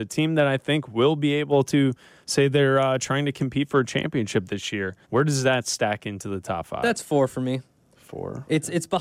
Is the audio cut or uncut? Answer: cut